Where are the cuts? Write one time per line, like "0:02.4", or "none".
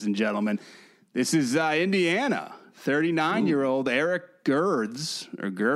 none

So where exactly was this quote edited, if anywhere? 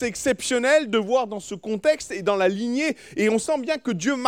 none

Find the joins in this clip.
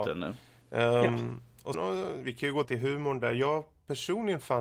0:01.7
0:02.6

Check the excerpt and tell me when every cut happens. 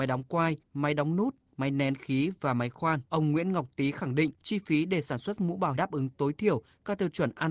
0:03.1
0:05.4
0:05.8

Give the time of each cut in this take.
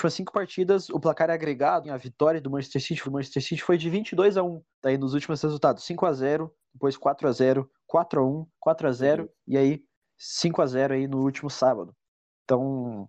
0:01.8
0:03.0
0:04.7
0:08.5

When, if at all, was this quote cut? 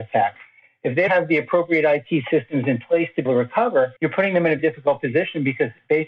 0:01.1
0:03.3
0:04.0
0:04.6

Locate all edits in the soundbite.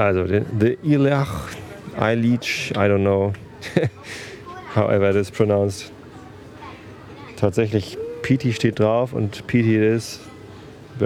none

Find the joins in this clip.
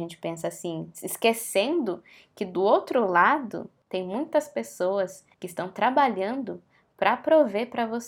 0:05.3

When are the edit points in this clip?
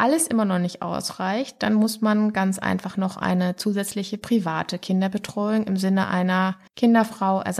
0:06.7

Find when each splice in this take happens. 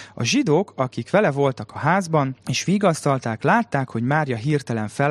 0:02.4

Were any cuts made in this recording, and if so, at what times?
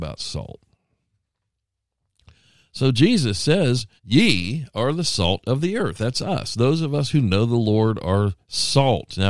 0:04.0

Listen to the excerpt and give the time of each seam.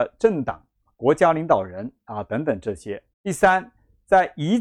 0:03.1

